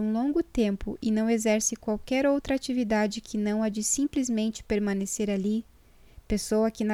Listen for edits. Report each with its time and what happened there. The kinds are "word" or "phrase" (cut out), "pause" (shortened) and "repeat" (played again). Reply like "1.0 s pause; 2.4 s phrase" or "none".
none